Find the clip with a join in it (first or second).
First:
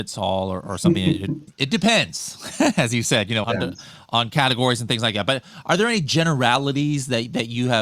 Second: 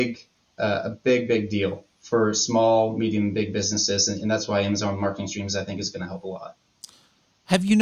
first